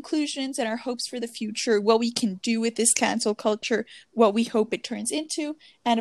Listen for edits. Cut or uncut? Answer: uncut